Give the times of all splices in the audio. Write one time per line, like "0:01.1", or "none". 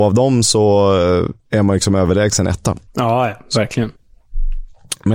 0:01.4
0:02.9